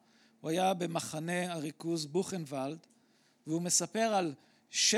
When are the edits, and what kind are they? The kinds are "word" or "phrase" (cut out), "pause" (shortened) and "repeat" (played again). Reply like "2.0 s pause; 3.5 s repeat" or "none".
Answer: none